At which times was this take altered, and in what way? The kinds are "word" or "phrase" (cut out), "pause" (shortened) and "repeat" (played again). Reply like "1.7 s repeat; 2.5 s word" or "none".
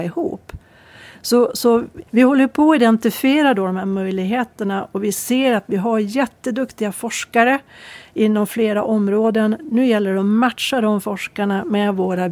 2.1 s pause